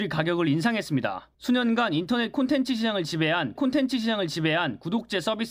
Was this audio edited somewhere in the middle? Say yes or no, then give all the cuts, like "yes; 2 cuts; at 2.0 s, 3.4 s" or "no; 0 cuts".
yes; 2 cuts; at 1.3 s, 3.6 s